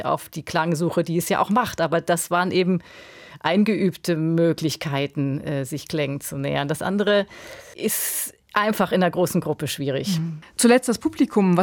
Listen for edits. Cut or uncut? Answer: uncut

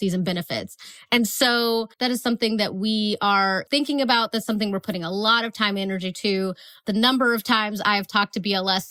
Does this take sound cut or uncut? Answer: cut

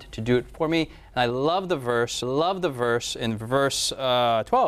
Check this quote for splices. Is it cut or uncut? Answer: cut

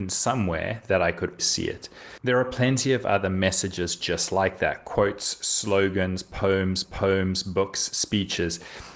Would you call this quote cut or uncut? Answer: cut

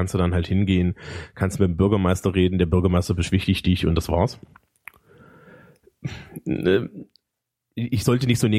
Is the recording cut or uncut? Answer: uncut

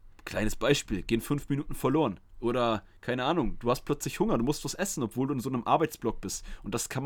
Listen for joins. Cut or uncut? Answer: cut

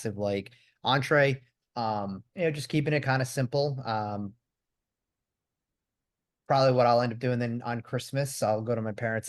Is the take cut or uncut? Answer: cut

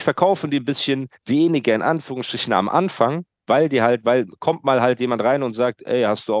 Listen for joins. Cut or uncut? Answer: cut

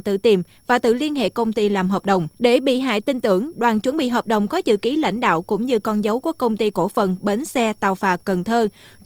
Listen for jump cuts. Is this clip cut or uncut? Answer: cut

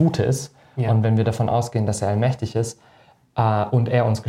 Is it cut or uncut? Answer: uncut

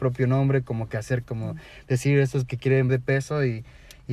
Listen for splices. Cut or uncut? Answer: cut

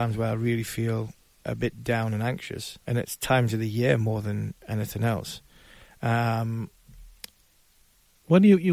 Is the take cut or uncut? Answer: cut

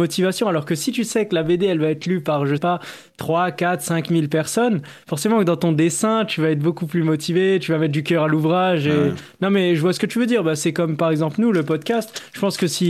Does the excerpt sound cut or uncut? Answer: cut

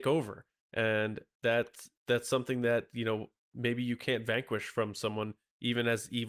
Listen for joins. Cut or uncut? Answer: cut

